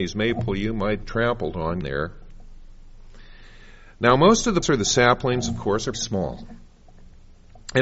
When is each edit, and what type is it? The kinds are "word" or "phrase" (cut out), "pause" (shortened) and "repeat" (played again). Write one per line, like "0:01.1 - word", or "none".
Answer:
0:01.0 - word
0:01.8 - word
0:04.6 - word
0:05.9 - word